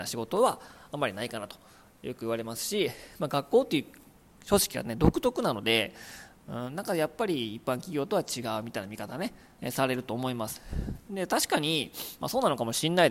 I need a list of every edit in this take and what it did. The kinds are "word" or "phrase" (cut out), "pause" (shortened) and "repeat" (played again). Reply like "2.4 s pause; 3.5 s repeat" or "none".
none

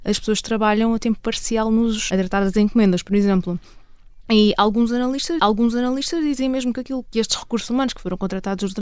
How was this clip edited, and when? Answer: 2.1 s phrase; 5.4 s repeat; 7.0 s word

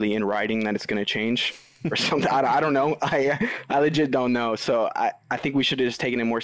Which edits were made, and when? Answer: none

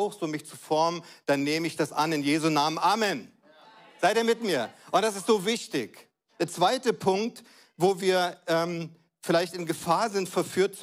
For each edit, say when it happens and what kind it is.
none

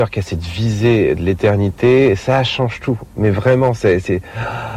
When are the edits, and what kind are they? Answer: none

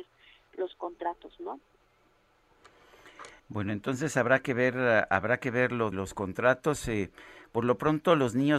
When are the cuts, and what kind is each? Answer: 3.4 s pause; 5.9 s phrase

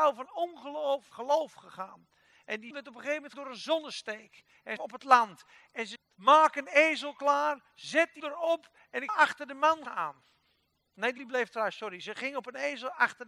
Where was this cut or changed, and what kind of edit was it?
1.1 s word; 2.7 s word; 3.3 s word; 4.8 s word; 6.0 s word; 8.2 s word; 9.1 s word; 9.8 s word; 11.2 s word

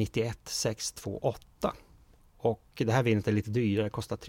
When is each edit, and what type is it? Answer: none

